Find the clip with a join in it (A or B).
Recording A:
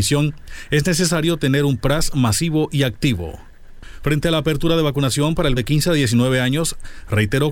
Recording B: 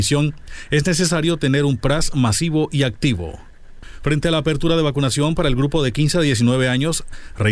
A